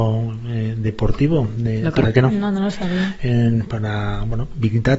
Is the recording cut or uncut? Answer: cut